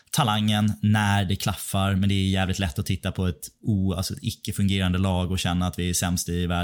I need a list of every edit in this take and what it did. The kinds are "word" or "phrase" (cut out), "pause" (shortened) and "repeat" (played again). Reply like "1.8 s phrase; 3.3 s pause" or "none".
none